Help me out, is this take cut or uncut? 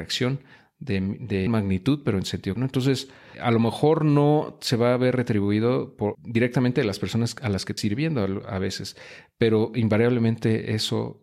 cut